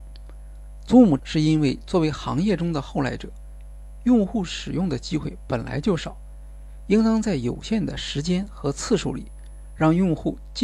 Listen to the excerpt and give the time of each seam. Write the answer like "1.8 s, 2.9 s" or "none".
1.2 s